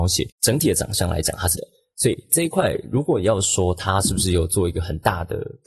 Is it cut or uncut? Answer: cut